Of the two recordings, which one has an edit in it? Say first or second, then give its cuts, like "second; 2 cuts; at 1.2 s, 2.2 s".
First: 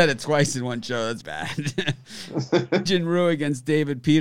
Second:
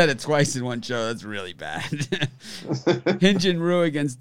first; 2 cuts; at 1.2 s, 2.9 s